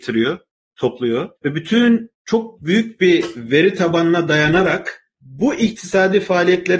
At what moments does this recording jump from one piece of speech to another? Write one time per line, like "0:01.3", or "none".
0:01.4
0:02.1
0:05.1